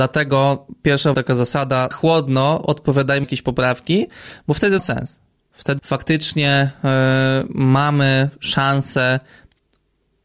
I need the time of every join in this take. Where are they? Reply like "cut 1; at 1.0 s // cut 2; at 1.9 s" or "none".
cut 1; at 1.1 s // cut 2; at 1.9 s // cut 3; at 3.2 s // cut 4; at 4.8 s // cut 5; at 5.8 s